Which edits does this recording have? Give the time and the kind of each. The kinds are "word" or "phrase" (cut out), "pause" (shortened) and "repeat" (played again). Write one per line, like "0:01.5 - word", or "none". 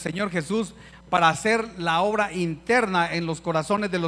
none